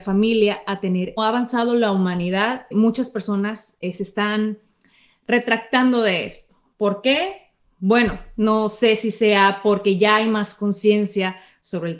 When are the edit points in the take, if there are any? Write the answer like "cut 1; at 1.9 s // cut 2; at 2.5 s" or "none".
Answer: cut 1; at 1.2 s // cut 2; at 2.7 s